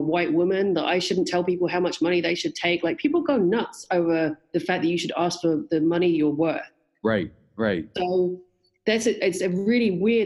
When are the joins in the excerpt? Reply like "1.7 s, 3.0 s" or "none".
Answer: none